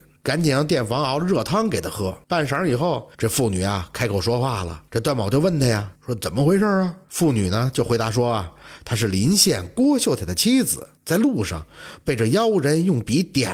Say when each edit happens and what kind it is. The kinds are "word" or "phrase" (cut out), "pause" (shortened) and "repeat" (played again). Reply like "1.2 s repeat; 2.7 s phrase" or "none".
2.2 s pause; 3.1 s pause; 4.9 s pause; 6.0 s pause; 7.0 s pause; 11.0 s pause